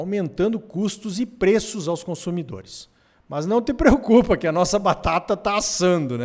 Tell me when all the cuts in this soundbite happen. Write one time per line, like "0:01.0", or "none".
none